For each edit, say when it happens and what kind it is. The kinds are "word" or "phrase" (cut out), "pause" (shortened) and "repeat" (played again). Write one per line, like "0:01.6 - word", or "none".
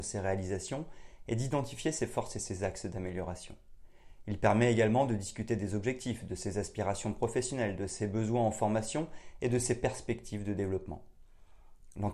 none